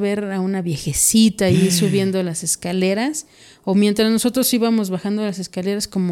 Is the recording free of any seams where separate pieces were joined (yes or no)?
yes